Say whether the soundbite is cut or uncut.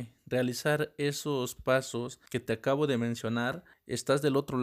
cut